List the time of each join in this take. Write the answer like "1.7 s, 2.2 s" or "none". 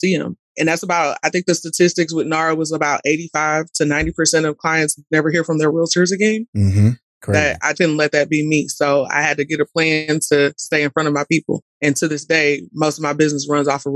7.7 s